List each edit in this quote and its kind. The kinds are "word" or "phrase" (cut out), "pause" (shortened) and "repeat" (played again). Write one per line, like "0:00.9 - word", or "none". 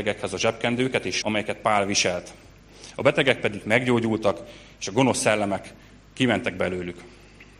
0:01.2 - word